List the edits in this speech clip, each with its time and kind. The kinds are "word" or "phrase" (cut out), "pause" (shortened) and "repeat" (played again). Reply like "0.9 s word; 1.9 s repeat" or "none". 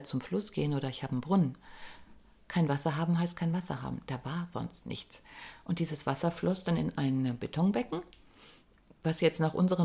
none